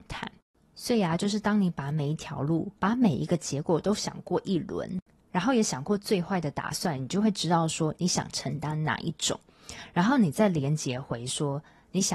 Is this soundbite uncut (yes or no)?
no